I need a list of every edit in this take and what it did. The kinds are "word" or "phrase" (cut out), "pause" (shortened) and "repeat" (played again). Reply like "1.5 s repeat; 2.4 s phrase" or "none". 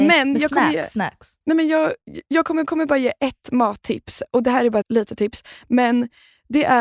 1.4 s pause; 2.7 s repeat; 4.8 s word